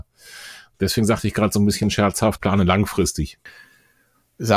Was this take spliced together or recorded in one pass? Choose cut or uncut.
cut